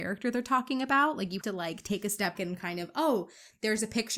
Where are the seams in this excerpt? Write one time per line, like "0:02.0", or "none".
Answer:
0:01.4
0:02.4